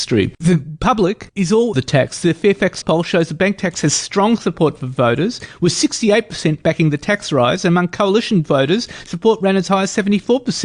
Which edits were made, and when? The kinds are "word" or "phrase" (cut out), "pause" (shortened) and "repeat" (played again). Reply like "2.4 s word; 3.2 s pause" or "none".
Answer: 1.7 s phrase; 2.8 s word